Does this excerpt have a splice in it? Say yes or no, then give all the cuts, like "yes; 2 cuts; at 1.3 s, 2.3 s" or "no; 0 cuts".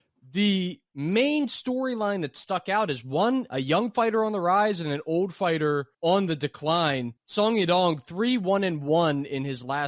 yes; 2 cuts; at 5.9 s, 7.2 s